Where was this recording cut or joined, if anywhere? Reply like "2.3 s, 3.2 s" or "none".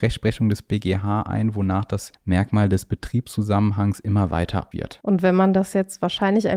2.1 s, 4.7 s